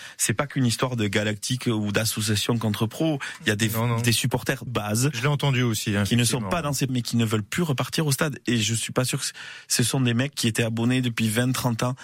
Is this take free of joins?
no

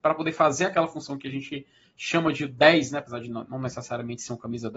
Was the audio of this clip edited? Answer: no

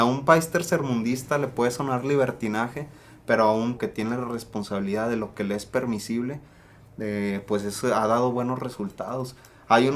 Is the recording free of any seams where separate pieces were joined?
no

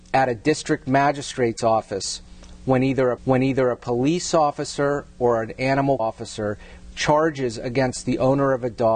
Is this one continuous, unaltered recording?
no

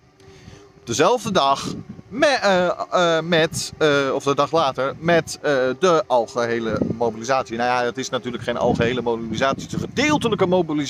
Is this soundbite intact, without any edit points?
yes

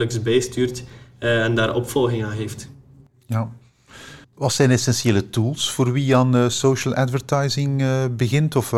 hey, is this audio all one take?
no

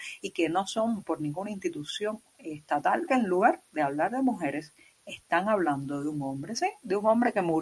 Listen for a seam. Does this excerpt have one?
yes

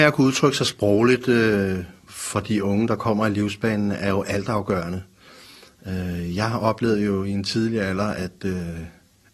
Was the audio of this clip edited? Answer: yes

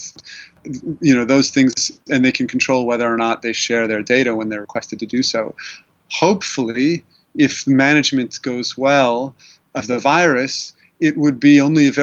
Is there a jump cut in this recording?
no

